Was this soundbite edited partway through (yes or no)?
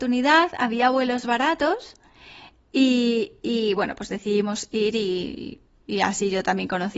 no